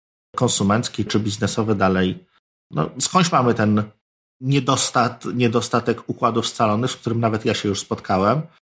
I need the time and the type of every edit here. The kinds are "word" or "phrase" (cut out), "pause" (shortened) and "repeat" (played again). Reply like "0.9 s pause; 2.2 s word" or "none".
1.1 s word